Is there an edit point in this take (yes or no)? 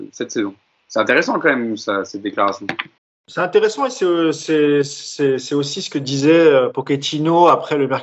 yes